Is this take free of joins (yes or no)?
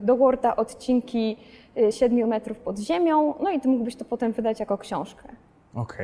yes